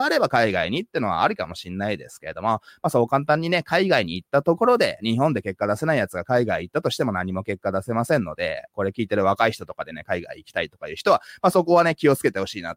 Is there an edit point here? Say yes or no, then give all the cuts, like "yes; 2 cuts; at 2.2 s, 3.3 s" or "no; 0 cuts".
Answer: yes; 1 cut; at 8.7 s